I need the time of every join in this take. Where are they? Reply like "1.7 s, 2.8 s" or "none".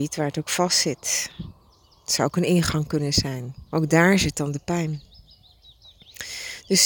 3.7 s